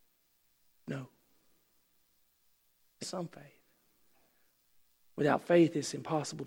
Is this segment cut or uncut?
cut